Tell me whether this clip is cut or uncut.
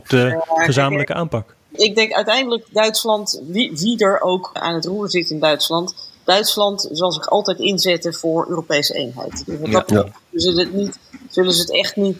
cut